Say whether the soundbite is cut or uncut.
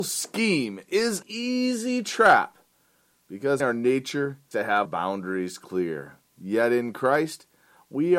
cut